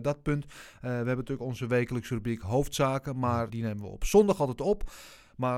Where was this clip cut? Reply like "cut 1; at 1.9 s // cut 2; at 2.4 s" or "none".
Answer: cut 1; at 3.5 s